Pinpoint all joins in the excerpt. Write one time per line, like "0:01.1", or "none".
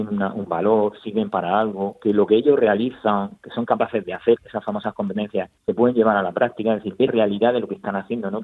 0:04.4
0:05.6
0:07.1